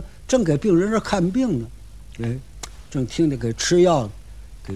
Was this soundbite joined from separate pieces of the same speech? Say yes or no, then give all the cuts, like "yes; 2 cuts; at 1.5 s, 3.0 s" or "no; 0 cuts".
no; 0 cuts